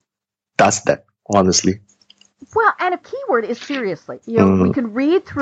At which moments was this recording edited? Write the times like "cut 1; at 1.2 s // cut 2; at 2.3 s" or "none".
cut 1; at 3.0 s // cut 2; at 4.2 s